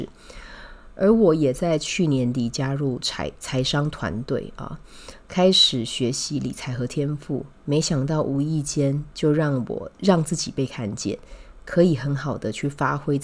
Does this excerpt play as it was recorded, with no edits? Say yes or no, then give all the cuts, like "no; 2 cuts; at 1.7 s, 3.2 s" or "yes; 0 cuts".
no; 1 cut; at 9.9 s